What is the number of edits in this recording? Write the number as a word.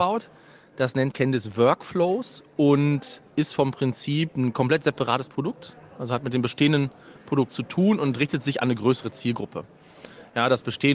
two